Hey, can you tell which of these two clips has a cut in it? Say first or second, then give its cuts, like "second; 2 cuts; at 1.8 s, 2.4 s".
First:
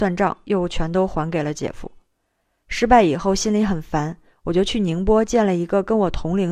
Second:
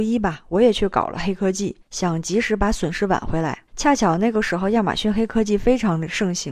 second; 2 cuts; at 1.8 s, 3.7 s